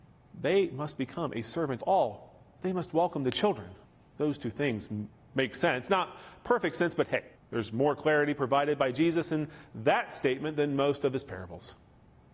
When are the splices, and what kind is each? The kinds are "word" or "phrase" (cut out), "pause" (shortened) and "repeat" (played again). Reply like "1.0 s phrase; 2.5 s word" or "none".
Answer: 1.8 s word; 3.8 s pause; 7.3 s pause